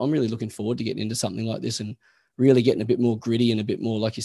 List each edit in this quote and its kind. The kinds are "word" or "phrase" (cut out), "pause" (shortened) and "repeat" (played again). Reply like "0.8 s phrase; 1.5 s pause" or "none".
none